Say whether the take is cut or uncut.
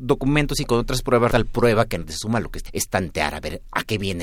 cut